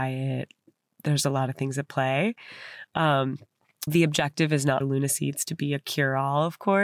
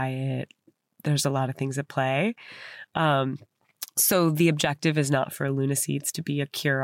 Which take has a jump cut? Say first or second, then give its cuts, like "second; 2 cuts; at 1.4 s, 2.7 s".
first; 2 cuts; at 3.9 s, 4.8 s